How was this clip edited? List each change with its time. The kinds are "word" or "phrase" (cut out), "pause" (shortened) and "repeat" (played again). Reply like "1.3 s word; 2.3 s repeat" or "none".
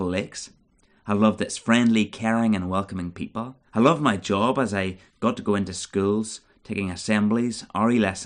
3.7 s pause